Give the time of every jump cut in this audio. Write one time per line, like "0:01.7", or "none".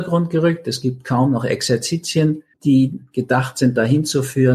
0:02.5